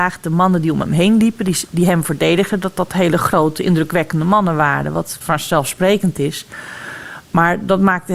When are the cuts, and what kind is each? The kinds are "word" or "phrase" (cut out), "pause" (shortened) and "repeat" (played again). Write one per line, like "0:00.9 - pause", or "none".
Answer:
0:05.2 - word